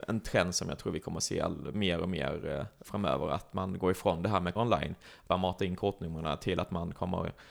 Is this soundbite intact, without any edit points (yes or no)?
no